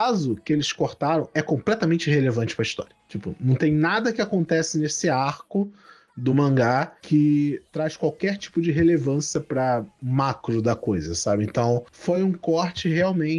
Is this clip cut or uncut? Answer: uncut